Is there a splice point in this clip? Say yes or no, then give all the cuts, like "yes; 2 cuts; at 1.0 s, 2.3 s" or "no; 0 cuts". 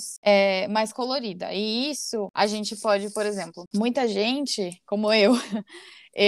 no; 0 cuts